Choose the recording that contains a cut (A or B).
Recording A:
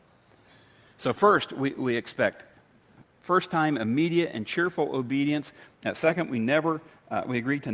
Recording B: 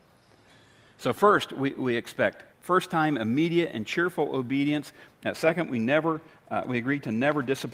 B